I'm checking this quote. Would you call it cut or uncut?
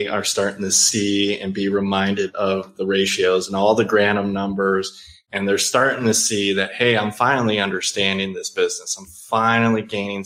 uncut